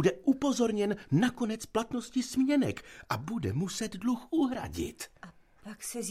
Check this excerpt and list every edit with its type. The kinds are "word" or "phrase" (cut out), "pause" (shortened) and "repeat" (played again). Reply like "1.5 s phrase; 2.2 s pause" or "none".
none